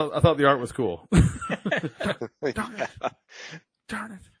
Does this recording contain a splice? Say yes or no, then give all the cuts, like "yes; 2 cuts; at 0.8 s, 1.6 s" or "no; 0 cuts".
no; 0 cuts